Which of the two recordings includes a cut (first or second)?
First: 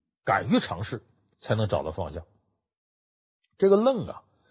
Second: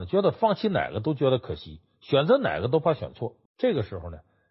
second